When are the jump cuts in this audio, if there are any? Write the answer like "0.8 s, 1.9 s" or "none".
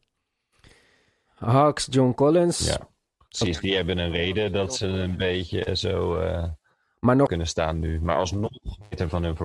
7.3 s